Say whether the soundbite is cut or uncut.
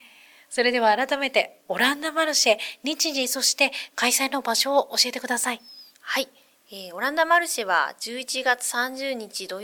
cut